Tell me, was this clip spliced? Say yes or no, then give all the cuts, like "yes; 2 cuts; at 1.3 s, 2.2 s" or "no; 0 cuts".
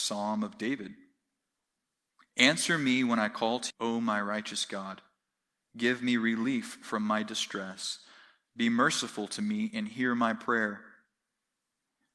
yes; 1 cut; at 3.7 s